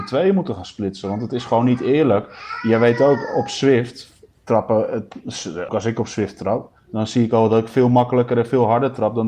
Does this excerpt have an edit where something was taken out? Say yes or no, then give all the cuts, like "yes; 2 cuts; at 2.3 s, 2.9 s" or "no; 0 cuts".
yes; 2 cuts; at 5.7 s, 6.8 s